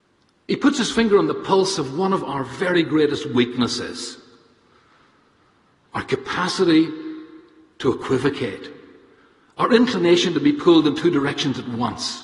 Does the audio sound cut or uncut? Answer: uncut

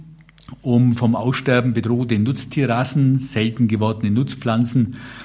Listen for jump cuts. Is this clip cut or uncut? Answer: uncut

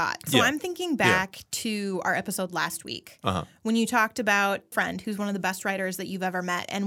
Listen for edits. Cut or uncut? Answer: cut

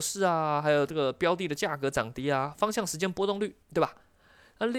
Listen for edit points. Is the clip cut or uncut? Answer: cut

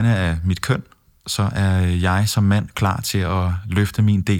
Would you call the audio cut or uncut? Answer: uncut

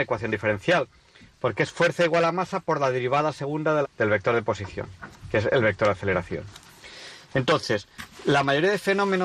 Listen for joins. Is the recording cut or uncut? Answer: cut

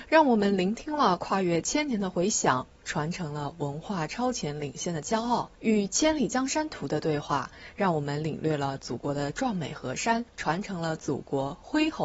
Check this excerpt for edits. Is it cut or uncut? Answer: cut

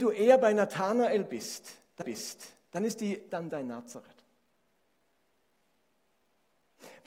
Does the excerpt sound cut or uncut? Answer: cut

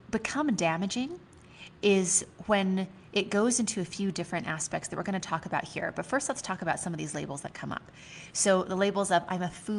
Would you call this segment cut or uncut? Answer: uncut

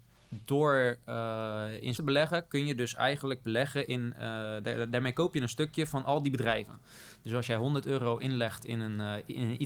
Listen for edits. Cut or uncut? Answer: cut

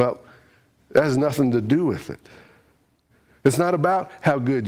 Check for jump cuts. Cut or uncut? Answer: uncut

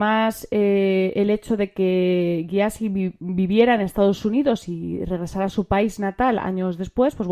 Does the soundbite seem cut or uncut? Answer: uncut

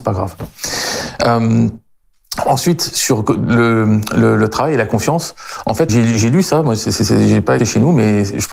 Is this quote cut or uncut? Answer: cut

